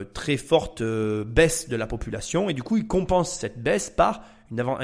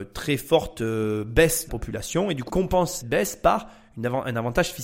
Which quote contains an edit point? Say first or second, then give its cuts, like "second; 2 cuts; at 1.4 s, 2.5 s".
second; 3 cuts; at 1.7 s, 2.5 s, 3.0 s